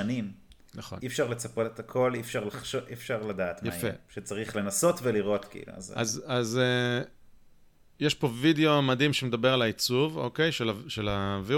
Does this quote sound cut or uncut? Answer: uncut